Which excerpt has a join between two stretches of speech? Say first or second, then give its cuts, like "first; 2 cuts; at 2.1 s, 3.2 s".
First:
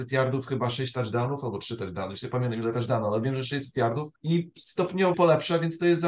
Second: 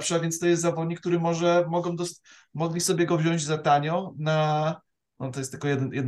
first; 2 cuts; at 4.2 s, 5.1 s